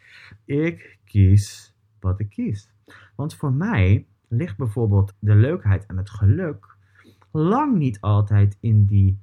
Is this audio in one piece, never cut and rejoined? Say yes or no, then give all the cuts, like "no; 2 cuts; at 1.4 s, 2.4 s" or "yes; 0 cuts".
yes; 0 cuts